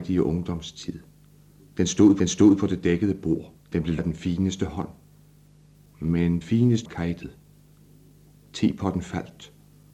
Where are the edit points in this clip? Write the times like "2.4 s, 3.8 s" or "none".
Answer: 2.2 s, 3.6 s, 4.0 s, 6.4 s, 6.8 s